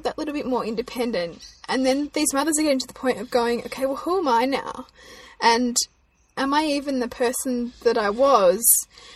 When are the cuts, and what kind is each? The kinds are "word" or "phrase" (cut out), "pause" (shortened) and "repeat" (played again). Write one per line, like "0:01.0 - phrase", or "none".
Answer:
none